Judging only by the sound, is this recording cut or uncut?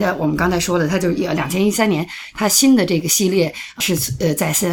cut